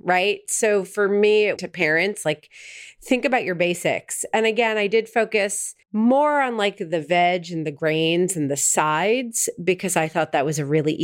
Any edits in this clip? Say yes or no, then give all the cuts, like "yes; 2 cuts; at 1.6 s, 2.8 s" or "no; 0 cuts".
yes; 2 cuts; at 1.6 s, 5.8 s